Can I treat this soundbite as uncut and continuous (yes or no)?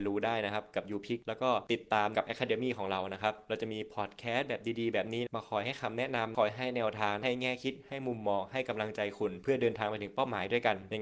yes